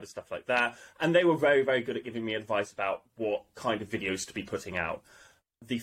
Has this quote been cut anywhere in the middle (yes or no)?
no